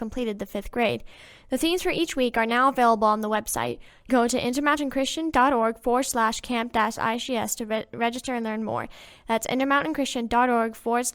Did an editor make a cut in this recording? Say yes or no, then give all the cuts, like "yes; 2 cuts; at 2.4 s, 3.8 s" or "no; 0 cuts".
yes; 1 cut; at 4.1 s